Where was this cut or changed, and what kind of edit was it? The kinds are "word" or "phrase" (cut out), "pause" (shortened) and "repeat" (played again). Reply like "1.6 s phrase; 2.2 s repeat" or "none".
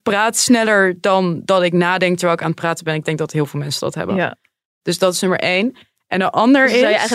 none